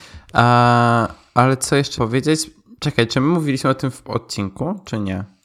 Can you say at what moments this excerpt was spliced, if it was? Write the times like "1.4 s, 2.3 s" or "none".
2.0 s, 4.0 s